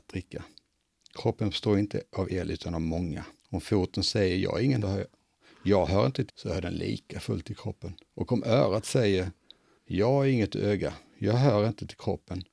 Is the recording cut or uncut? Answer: cut